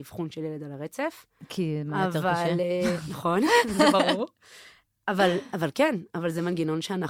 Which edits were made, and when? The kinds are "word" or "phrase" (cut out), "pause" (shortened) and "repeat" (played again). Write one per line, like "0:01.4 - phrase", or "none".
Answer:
none

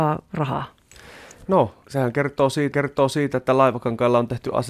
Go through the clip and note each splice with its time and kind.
0:01.8 - word
0:02.7 - repeat

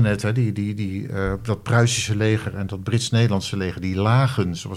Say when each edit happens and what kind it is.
none

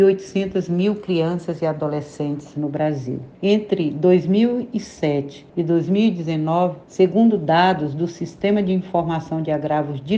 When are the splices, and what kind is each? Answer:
0:03.3 - pause
0:05.5 - pause
0:06.8 - pause

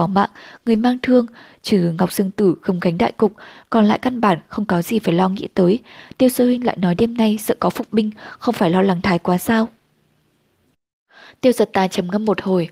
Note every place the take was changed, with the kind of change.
none

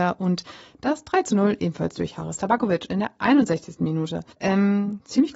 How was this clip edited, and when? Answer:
0:04.3 - pause

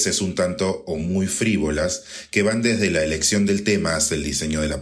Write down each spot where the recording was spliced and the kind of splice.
none

